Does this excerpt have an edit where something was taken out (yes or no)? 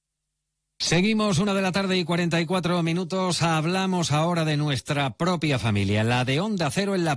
no